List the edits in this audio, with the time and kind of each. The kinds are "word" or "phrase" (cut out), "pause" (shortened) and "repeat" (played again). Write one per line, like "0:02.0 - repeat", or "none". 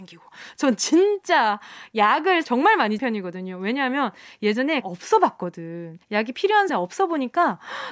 0:02.4 - word
0:03.0 - word
0:04.8 - phrase
0:06.0 - pause
0:06.7 - word